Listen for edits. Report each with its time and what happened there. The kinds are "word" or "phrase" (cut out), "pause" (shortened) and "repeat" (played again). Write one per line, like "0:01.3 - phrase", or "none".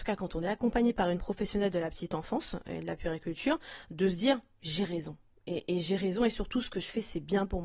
none